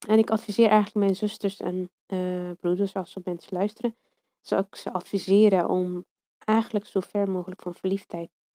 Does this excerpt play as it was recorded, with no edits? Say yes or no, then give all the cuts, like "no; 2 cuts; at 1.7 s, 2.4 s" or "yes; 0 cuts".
no; 1 cut; at 2.0 s